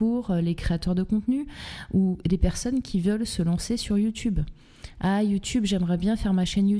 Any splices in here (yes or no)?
no